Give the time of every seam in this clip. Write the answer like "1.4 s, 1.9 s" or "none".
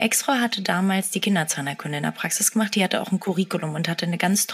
none